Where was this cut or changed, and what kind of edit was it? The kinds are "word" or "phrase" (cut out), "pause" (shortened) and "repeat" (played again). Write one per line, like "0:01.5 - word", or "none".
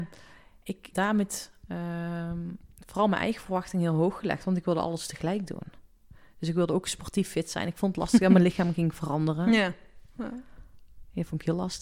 0:00.9 - word